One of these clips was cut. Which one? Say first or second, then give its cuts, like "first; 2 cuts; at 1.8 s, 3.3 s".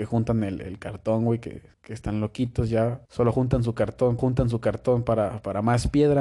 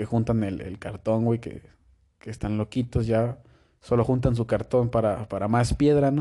first; 3 cuts; at 1.7 s, 3.1 s, 4.2 s